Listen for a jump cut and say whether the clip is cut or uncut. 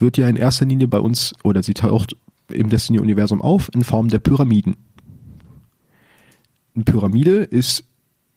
uncut